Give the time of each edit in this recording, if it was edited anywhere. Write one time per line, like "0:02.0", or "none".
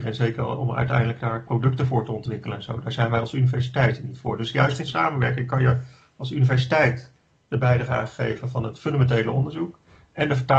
0:04.9